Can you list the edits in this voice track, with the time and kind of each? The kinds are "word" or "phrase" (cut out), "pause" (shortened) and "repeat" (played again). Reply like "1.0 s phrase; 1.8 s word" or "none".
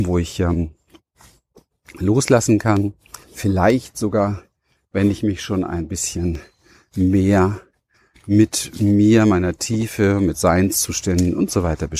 3.2 s pause